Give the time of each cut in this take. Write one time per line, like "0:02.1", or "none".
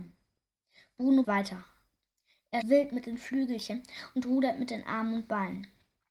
0:01.2
0:02.6